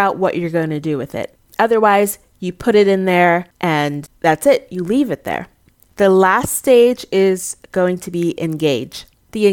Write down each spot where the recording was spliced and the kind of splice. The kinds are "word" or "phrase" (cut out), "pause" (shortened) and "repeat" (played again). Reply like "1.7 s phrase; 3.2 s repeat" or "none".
none